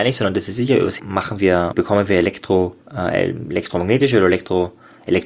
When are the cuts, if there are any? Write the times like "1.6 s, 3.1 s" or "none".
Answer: 1.0 s, 1.7 s, 2.8 s